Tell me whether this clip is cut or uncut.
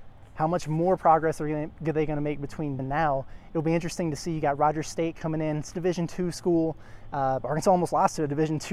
cut